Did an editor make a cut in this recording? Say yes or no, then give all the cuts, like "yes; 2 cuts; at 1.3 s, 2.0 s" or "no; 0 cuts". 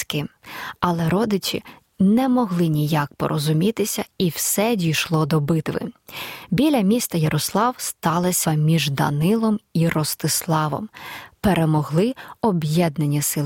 yes; 1 cut; at 8.5 s